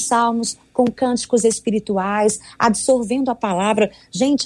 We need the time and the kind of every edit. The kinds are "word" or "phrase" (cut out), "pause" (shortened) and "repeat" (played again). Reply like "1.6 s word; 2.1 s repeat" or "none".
none